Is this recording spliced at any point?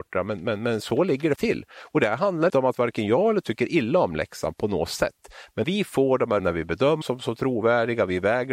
yes; 6 cuts; at 1.4 s, 2.5 s, 3.4 s, 5.6 s, 6.4 s, 7.0 s

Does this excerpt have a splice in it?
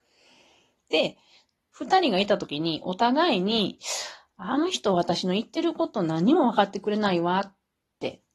no; 0 cuts

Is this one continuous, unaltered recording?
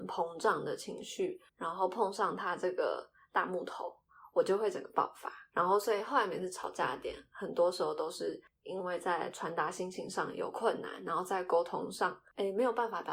no; 1 cut; at 1.5 s

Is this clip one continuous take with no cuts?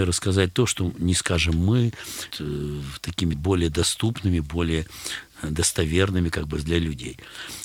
no; 2 cuts; at 2.3 s, 3.3 s

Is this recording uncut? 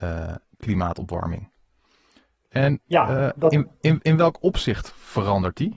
yes; 0 cuts

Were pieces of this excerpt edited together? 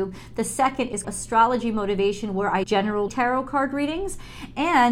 yes; 3 cuts; at 1.0 s, 2.6 s, 3.1 s

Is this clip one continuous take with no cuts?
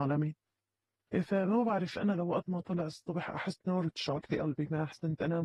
yes; 0 cuts

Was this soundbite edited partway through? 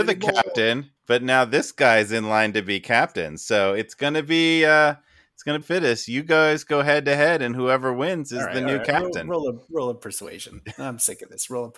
yes; 2 cuts; at 1.0 s, 5.6 s

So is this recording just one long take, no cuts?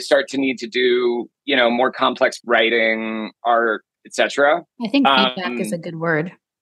no; 2 cuts; at 2.4 s, 4.7 s

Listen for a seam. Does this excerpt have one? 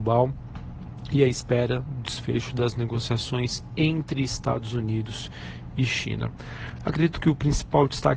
no; 0 cuts

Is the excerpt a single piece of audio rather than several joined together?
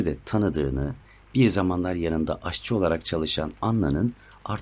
yes; 0 cuts

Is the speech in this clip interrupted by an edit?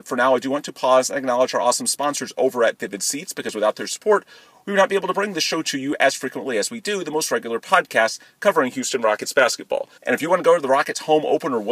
yes; 1 cut; at 10.0 s

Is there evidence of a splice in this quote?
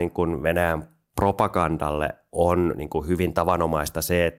no; 0 cuts

